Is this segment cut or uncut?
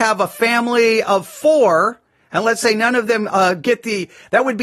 uncut